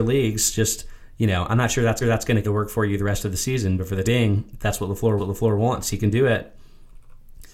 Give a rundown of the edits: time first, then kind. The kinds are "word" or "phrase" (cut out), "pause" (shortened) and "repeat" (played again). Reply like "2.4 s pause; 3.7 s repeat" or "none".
2.0 s repeat; 2.4 s word; 4.0 s word; 5.2 s repeat